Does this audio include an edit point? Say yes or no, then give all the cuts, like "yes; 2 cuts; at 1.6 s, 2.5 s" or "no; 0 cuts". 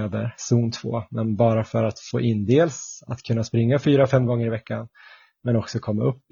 no; 0 cuts